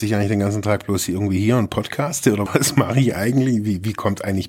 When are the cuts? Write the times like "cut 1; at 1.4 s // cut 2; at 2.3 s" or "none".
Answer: cut 1; at 2.5 s